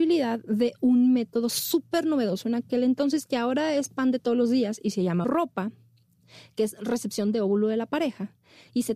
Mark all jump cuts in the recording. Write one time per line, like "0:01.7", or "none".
0:05.2